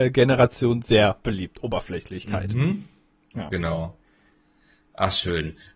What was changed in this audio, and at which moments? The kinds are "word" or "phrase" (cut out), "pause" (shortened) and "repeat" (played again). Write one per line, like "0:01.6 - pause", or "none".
none